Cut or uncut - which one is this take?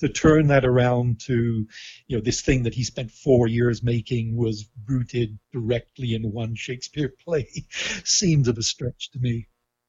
cut